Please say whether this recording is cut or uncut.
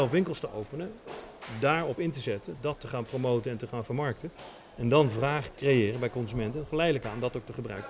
uncut